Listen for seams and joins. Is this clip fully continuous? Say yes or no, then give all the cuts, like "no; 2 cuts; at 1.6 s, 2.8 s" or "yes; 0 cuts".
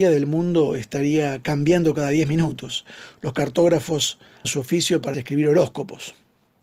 no; 2 cuts; at 4.4 s, 5.1 s